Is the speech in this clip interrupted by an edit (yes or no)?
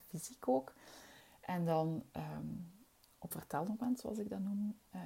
yes